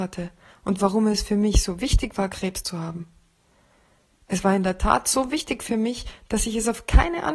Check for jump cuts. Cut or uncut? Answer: uncut